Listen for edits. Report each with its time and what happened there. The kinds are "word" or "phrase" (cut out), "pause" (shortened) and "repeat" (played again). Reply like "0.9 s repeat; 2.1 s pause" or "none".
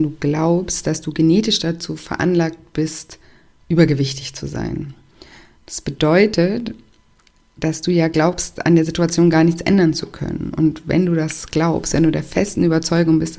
none